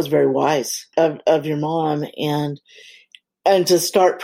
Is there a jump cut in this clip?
yes; 1 cut; at 0.9 s

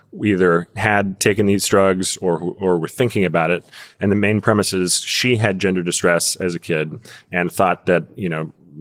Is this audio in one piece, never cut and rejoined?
yes; 0 cuts

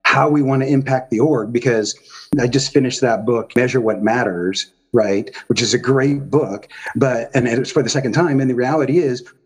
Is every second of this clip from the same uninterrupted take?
yes; 0 cuts

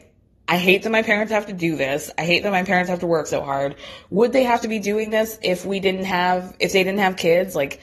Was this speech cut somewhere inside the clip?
no; 0 cuts

